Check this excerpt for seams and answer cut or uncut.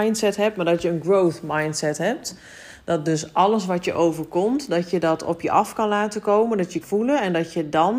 cut